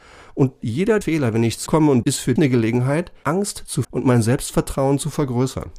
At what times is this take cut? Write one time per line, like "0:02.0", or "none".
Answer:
0:01.0
0:01.7
0:02.0
0:02.4
0:03.2
0:03.8